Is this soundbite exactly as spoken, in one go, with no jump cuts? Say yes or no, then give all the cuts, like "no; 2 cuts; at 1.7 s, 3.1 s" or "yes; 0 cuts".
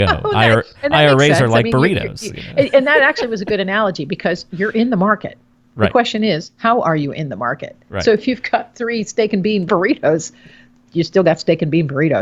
yes; 0 cuts